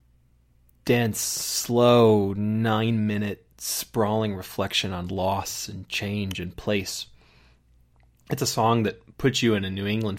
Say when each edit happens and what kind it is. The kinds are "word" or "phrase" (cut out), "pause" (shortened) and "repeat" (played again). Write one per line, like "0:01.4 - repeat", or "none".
none